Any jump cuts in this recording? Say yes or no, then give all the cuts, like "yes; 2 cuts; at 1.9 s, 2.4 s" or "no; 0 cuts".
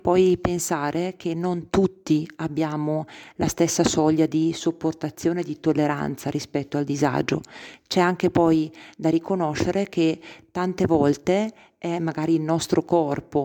no; 0 cuts